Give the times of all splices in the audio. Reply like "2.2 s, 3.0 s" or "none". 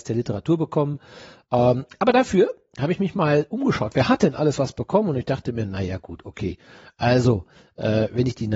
none

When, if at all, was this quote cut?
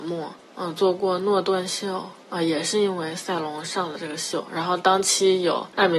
none

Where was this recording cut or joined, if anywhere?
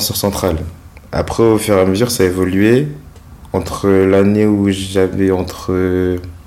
none

